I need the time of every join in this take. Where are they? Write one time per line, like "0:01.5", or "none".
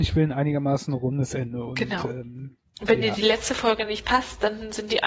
none